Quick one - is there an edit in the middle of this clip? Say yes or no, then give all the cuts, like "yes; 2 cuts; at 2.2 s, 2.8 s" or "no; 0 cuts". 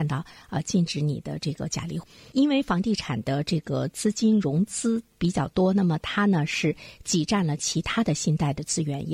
no; 0 cuts